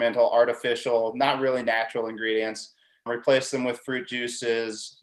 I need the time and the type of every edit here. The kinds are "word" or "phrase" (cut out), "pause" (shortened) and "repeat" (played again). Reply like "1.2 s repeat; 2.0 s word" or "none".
3.1 s word